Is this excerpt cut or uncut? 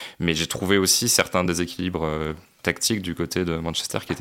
uncut